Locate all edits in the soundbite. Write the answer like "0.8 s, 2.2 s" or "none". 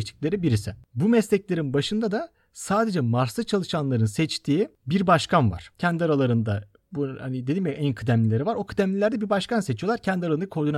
none